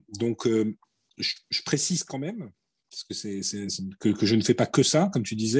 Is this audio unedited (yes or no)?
yes